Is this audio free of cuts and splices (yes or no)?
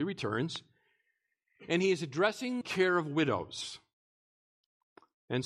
no